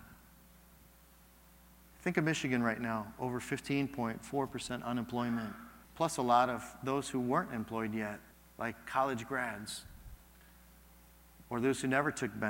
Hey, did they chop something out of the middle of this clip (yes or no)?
yes